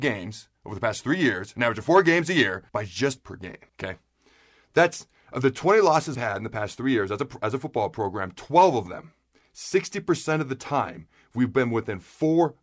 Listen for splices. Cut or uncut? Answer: cut